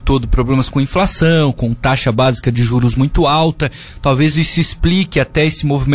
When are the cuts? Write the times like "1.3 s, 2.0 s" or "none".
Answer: none